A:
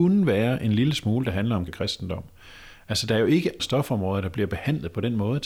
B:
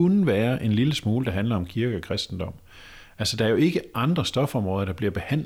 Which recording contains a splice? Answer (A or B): A